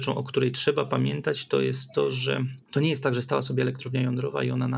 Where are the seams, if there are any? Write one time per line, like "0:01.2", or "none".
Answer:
0:02.6